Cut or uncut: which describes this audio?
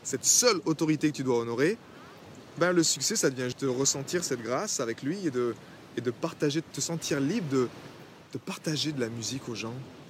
cut